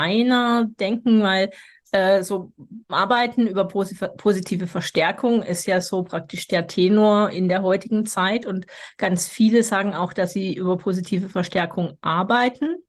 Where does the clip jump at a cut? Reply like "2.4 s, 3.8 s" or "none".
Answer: 2.8 s